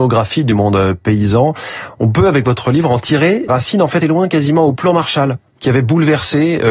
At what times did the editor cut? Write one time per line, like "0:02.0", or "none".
0:03.5
0:04.0
0:05.5